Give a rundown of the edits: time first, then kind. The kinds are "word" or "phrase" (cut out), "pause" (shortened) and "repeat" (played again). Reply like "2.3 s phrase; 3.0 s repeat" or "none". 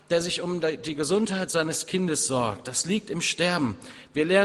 none